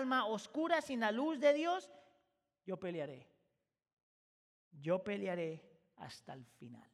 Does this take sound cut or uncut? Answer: uncut